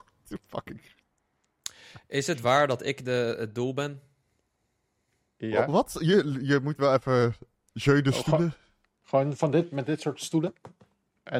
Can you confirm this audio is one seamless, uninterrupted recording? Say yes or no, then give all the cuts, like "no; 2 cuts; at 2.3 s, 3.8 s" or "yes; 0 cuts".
yes; 0 cuts